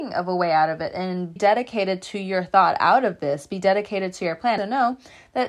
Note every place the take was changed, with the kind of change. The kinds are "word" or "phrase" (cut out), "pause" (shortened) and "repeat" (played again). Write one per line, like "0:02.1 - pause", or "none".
0:01.4 - word
0:04.6 - phrase